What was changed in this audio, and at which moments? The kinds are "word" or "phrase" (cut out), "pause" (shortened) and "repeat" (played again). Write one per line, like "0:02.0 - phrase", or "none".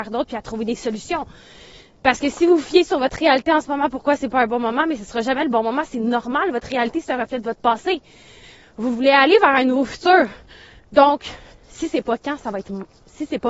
none